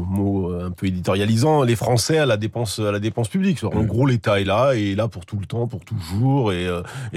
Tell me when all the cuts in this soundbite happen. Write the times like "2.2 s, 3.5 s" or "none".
none